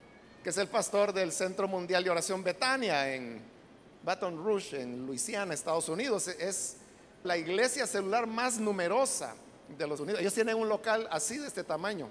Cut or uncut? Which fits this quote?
cut